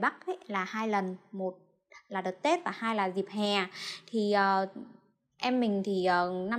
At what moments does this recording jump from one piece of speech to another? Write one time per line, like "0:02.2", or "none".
none